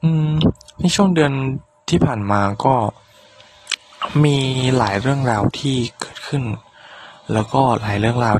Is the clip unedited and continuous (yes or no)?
yes